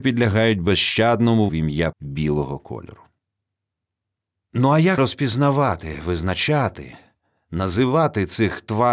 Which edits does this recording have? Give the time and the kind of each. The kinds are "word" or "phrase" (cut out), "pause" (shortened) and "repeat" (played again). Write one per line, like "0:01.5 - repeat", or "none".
0:01.5 - word
0:01.9 - word
0:05.0 - word